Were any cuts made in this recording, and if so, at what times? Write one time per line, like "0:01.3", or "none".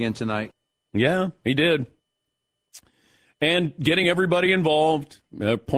none